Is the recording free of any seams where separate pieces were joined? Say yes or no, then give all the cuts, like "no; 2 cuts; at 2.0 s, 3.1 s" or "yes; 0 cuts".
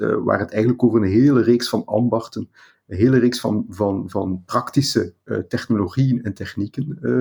yes; 0 cuts